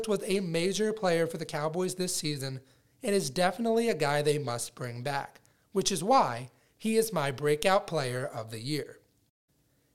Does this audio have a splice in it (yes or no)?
no